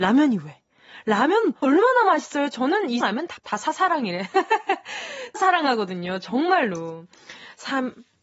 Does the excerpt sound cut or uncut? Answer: cut